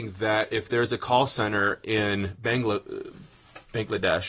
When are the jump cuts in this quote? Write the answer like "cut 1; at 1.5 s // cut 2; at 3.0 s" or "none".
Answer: none